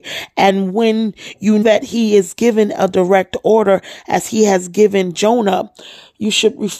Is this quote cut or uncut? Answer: cut